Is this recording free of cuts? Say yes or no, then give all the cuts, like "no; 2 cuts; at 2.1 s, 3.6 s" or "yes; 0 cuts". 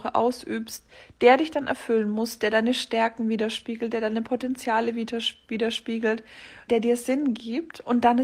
no; 1 cut; at 6.7 s